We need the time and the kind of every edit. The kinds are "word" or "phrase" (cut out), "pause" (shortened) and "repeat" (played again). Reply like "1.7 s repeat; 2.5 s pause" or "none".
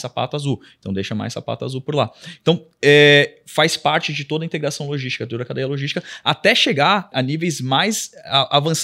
7.1 s word